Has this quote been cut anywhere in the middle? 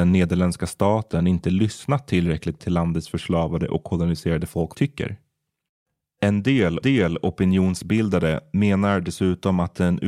yes; 3 cuts; at 2.6 s, 4.7 s, 6.8 s

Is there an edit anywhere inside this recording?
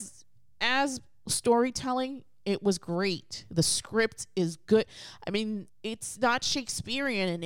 no; 0 cuts

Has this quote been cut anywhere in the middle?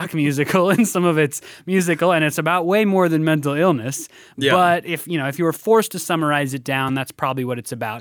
no; 0 cuts

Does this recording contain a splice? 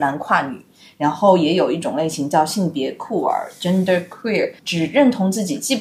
yes; 1 cut; at 4.6 s

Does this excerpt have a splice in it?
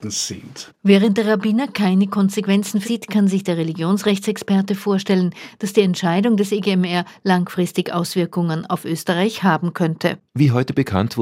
yes; 2 cuts; at 2.8 s, 10.3 s

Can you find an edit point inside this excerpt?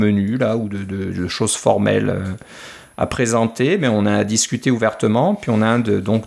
no; 0 cuts

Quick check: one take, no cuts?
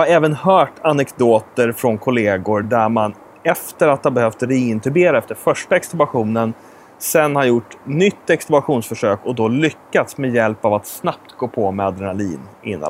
yes; 0 cuts

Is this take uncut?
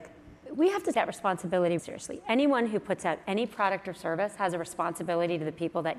no; 2 cuts; at 0.9 s, 1.8 s

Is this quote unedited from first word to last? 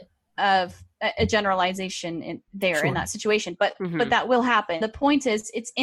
no; 2 cuts; at 2.5 s, 4.8 s

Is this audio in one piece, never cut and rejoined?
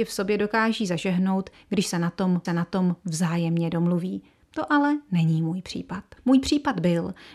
no; 2 cuts; at 2.4 s, 6.2 s

